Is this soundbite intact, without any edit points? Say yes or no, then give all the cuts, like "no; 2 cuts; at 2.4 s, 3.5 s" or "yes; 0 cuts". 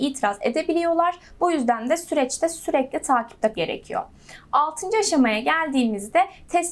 no; 1 cut; at 3.5 s